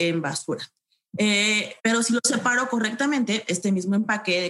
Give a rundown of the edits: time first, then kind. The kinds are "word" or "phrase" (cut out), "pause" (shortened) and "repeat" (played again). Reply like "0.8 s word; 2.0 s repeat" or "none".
1.8 s pause